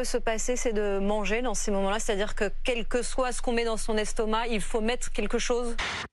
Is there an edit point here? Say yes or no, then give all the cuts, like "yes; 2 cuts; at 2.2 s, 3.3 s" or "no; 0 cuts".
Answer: no; 0 cuts